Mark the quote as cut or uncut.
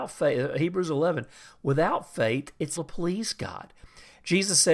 cut